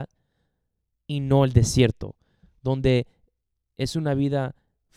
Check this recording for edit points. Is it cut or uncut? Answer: uncut